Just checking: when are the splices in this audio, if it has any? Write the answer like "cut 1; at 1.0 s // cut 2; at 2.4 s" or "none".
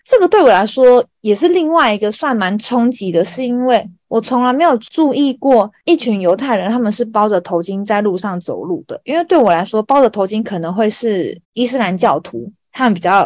cut 1; at 11.4 s